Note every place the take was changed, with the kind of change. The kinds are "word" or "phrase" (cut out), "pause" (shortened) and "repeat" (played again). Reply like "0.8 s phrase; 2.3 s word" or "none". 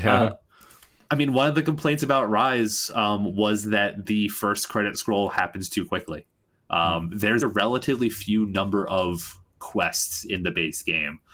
7.4 s word

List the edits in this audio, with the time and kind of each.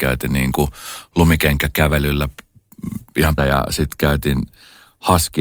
3.4 s word

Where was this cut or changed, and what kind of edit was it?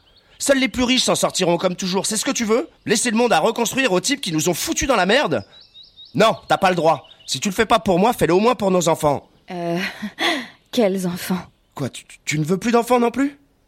2.8 s pause; 11.6 s pause; 12.2 s pause

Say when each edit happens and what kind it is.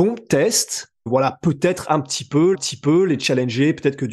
1.1 s phrase; 2.5 s repeat

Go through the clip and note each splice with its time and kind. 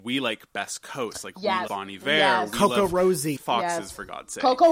1.7 s word; 3.4 s word

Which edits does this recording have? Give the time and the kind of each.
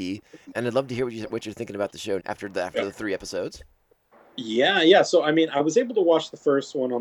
2.2 s word

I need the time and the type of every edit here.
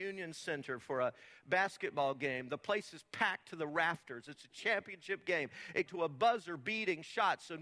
5.9 s phrase

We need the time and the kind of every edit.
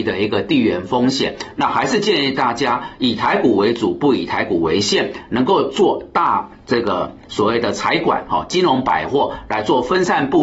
6.6 s pause

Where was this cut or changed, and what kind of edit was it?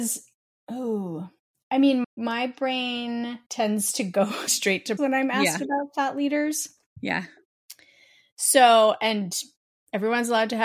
2.0 s word; 3.5 s pause; 4.5 s word; 5.0 s word

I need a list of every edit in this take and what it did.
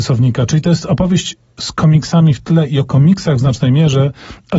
none

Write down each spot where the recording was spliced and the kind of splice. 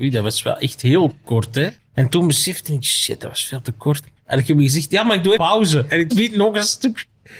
1.8 s pause; 4.2 s pause; 5.4 s word; 6.1 s word

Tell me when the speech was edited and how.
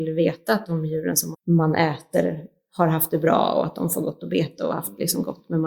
1.3 s word

